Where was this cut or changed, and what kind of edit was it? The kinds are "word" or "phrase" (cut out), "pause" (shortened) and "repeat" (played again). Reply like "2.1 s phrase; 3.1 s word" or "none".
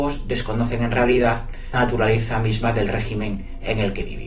1.7 s word